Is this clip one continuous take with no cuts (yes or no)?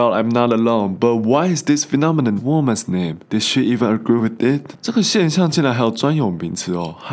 no